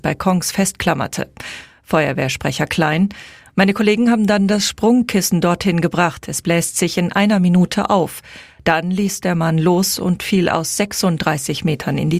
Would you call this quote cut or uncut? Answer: uncut